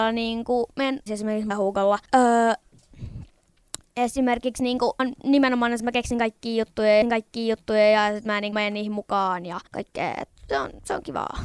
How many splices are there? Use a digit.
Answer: 8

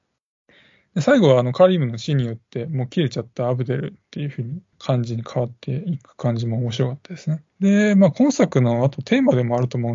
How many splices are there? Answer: 2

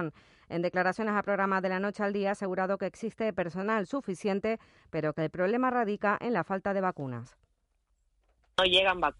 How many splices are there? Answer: 0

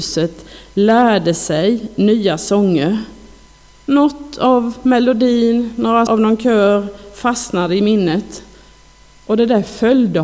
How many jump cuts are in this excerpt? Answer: 1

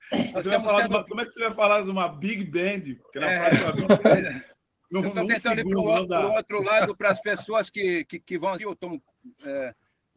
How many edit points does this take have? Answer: 1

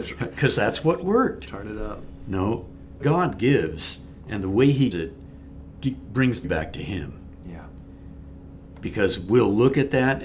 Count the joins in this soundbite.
3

